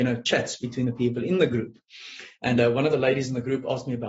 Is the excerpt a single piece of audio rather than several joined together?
yes; 0 cuts

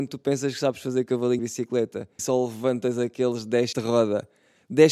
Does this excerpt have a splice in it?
yes; 3 cuts; at 1.4 s, 2.2 s, 3.7 s

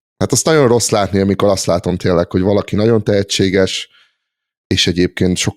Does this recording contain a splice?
no; 0 cuts

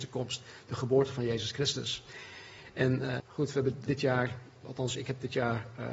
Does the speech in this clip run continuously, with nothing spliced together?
no; 3 cuts; at 3.2 s, 3.9 s, 4.6 s

